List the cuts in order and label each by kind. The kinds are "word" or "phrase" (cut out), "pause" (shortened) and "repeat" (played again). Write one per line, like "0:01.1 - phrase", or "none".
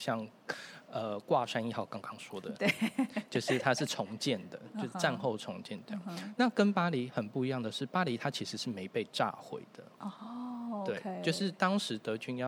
0:09.9 - pause